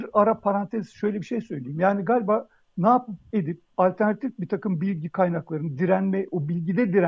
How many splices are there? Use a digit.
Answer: 0